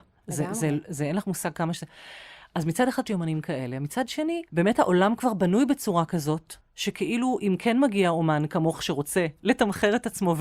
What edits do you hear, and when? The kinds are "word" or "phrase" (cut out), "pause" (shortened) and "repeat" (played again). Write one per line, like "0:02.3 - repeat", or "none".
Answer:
0:03.1 - word
0:04.5 - pause
0:06.6 - pause